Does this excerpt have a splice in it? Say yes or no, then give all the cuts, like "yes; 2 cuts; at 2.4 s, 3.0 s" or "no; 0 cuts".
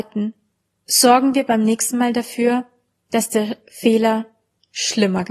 no; 0 cuts